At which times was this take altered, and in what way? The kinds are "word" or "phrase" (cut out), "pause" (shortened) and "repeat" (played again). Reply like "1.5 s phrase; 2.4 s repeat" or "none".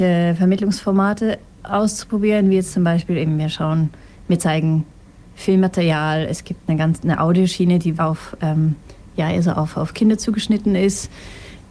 8.0 s word